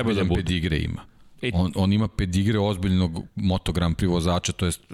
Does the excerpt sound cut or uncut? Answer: uncut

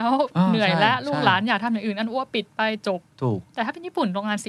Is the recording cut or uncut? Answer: cut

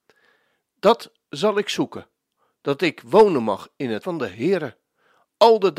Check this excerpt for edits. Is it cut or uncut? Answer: cut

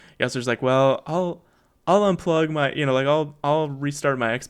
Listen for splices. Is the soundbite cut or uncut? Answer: uncut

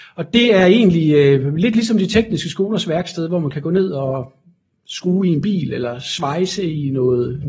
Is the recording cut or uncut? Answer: uncut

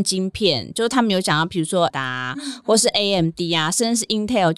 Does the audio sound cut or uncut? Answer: cut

